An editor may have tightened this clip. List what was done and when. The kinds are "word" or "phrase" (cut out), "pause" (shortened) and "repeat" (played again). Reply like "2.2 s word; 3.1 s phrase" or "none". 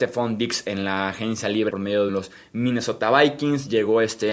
1.7 s word; 2.1 s phrase